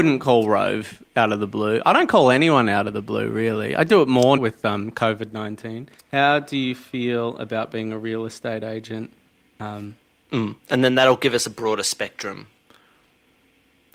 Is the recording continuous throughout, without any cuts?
no; 4 cuts; at 4.4 s, 6.0 s, 9.3 s, 10.6 s

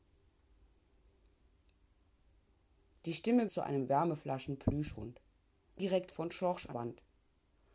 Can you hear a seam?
yes; 4 cuts; at 3.5 s, 5.8 s, 6.1 s, 6.7 s

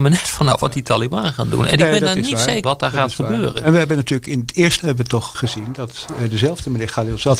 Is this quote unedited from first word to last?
no; 3 cuts; at 2.6 s, 4.8 s, 5.3 s

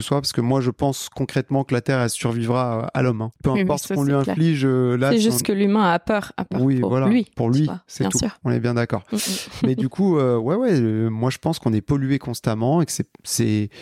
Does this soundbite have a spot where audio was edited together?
no; 0 cuts

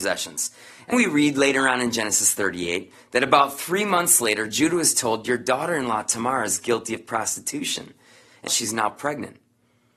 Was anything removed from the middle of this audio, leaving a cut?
yes; 2 cuts; at 0.9 s, 8.5 s

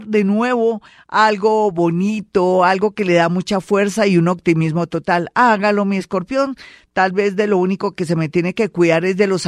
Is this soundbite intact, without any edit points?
yes; 0 cuts

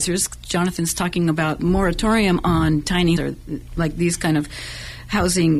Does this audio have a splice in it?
yes; 2 cuts; at 1.6 s, 3.2 s

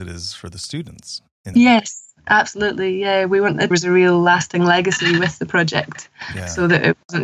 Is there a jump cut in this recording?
yes; 2 cuts; at 1.5 s, 3.7 s

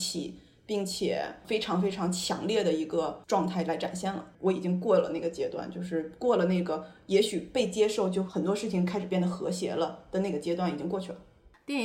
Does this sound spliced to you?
yes; 1 cut; at 4.3 s

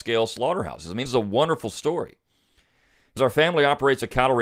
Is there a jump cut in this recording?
yes; 2 cuts; at 1.1 s, 3.2 s

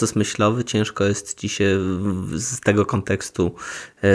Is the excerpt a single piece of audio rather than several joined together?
yes; 0 cuts

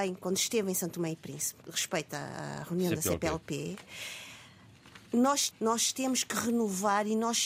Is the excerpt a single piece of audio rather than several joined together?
no; 2 cuts; at 1.6 s, 5.5 s

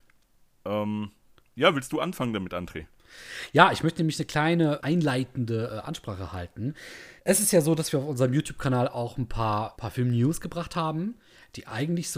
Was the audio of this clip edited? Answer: yes; 3 cuts; at 4.8 s, 7.2 s, 9.8 s

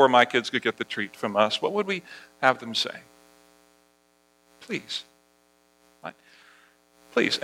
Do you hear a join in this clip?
no; 0 cuts

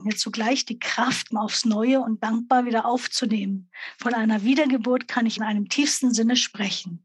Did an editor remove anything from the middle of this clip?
yes; 2 cuts; at 1.3 s, 5.4 s

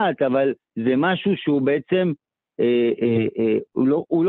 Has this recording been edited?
no; 0 cuts

